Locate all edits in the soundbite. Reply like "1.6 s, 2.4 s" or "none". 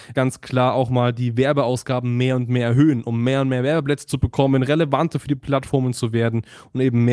none